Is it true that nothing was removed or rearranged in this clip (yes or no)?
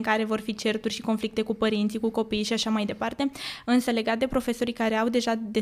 yes